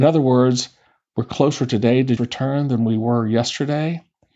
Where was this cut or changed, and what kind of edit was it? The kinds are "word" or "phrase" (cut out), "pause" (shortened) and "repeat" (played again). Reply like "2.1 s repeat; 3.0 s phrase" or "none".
2.2 s word